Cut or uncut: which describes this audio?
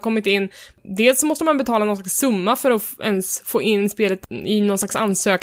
uncut